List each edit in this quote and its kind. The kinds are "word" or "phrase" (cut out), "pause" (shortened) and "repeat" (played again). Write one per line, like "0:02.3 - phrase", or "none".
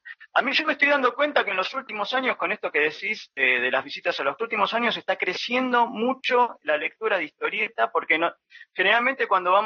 0:04.4 - phrase